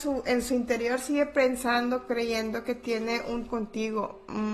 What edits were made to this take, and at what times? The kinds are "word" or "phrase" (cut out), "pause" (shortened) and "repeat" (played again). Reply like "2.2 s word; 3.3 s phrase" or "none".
3.5 s word

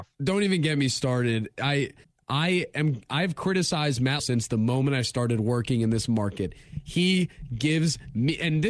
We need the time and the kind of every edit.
2.0 s pause; 4.2 s word

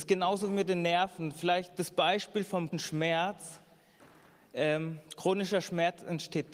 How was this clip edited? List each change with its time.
2.7 s word

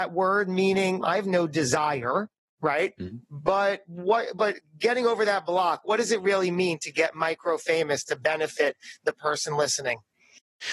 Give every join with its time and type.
1.0 s word

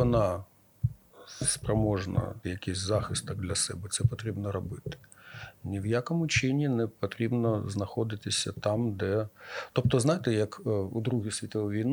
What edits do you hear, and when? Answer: 2.4 s word

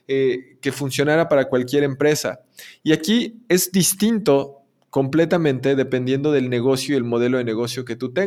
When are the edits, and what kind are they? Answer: none

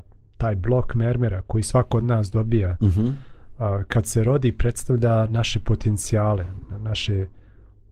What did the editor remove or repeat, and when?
none

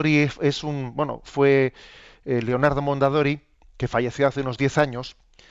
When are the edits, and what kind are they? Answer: none

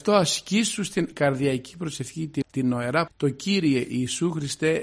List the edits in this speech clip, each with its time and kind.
1.1 s word; 2.4 s word; 3.1 s word

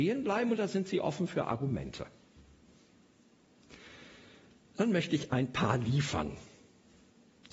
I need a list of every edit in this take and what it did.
none

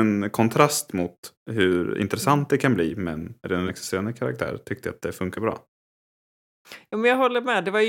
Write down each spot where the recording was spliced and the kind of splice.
3.7 s word; 5.3 s word

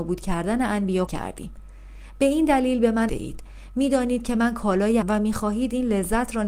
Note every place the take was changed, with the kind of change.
1.1 s word; 3.1 s phrase; 5.0 s word

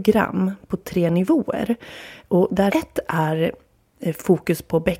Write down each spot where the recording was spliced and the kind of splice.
2.7 s word

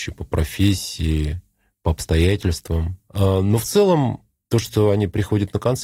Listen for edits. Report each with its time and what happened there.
none

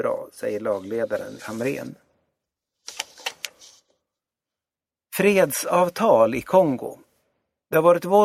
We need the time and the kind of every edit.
1.4 s word

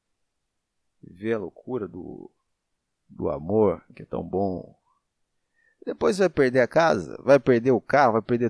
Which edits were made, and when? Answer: none

